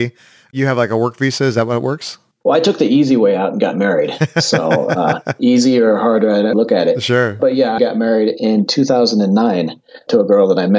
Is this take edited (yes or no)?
yes